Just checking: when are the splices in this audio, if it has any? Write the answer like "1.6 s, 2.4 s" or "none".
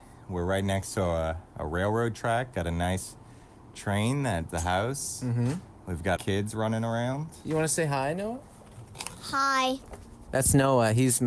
1.5 s, 2.5 s, 4.5 s, 6.2 s